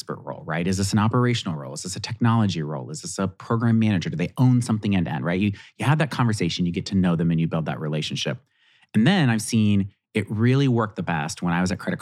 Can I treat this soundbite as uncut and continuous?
yes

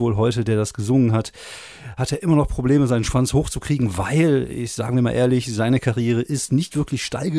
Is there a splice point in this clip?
no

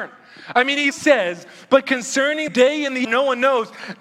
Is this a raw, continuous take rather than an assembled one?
no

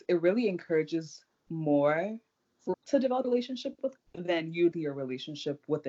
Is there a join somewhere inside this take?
yes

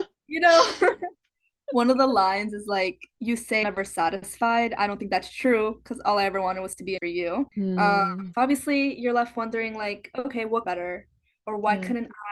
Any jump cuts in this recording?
yes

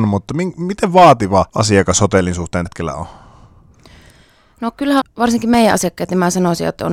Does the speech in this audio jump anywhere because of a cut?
yes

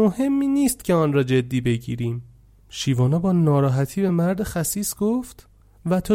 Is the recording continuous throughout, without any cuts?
yes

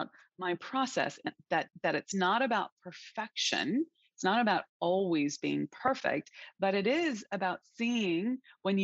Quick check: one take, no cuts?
yes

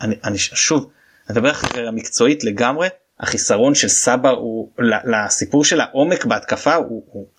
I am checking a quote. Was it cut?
no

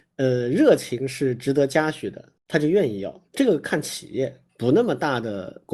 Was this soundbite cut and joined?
yes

